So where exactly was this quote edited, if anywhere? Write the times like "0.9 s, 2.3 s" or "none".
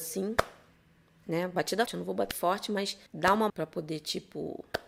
1.9 s, 2.3 s, 3.1 s, 3.5 s

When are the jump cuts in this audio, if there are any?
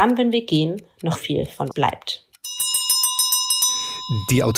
1.2 s, 1.7 s

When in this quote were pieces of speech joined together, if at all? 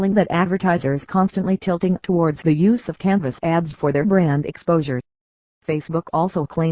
none

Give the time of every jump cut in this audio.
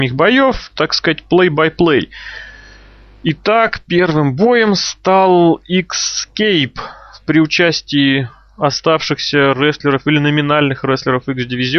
none

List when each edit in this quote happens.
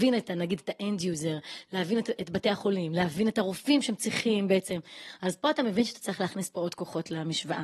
none

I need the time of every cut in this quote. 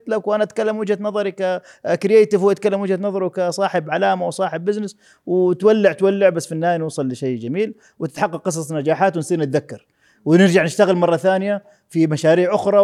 none

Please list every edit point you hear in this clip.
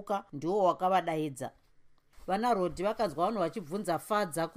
none

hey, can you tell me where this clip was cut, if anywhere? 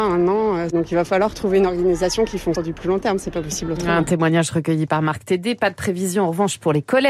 2.6 s

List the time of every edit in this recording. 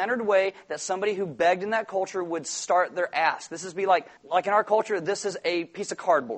4.2 s

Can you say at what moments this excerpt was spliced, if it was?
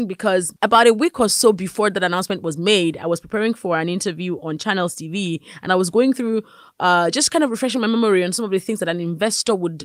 none

